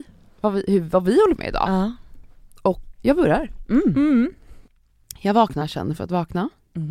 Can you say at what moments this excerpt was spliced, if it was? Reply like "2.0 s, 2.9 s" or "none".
1.4 s, 2.9 s, 5.6 s